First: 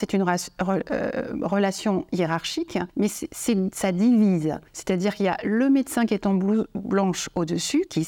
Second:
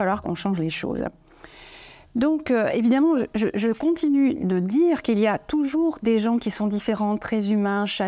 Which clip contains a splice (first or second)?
first